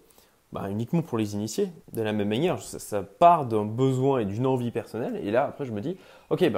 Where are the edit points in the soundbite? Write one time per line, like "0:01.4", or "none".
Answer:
0:01.8